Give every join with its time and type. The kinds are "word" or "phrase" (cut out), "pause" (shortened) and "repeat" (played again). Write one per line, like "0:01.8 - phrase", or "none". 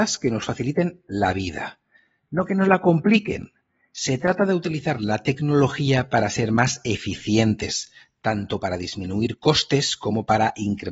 none